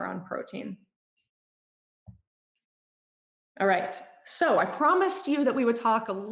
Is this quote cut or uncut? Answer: uncut